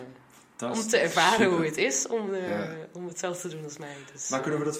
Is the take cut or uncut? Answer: uncut